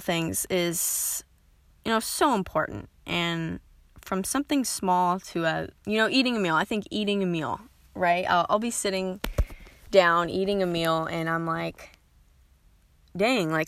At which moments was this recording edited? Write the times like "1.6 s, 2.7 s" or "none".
5.8 s